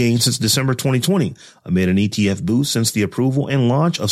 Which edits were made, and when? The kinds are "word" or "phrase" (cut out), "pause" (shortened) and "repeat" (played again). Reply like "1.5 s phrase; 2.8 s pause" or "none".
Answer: none